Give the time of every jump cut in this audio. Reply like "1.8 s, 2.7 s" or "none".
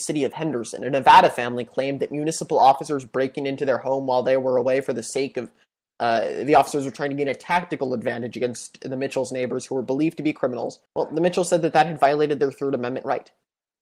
10.9 s